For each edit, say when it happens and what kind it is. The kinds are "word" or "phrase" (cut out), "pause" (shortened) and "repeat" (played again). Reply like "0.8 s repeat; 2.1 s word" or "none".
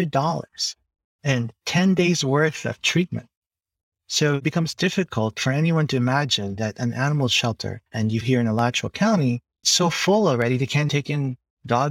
7.9 s pause; 8.2 s word; 9.6 s word; 10.9 s word